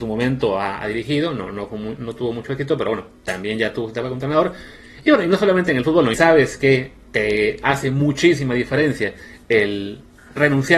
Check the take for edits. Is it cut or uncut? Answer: cut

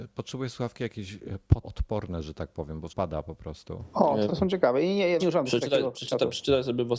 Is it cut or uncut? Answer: cut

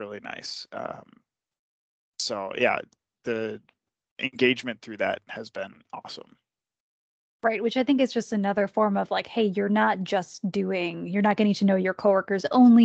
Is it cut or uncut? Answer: uncut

